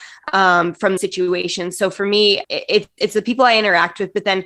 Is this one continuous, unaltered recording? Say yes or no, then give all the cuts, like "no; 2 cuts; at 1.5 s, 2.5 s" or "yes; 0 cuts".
no; 3 cuts; at 1.0 s, 2.4 s, 3.0 s